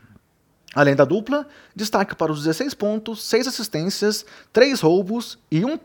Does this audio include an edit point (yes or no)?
no